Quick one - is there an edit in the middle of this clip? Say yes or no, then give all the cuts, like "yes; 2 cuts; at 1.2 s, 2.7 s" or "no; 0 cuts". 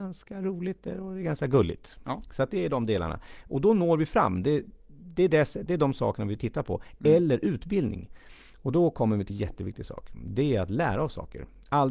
yes; 1 cut; at 9.3 s